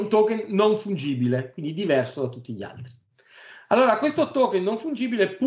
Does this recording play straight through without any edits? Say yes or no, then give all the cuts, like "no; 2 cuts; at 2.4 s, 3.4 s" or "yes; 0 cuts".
yes; 0 cuts